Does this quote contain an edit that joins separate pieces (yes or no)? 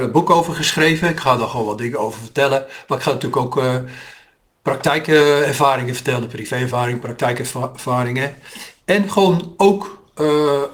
no